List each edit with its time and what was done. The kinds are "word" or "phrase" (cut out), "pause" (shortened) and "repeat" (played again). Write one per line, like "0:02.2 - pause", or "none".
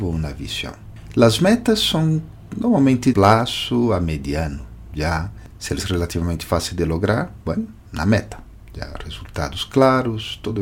0:03.1 - phrase
0:05.8 - word
0:07.8 - pause